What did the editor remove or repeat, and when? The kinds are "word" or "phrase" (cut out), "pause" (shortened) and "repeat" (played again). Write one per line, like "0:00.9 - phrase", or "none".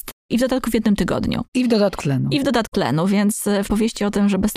0:02.0 - word
0:02.7 - word
0:03.6 - word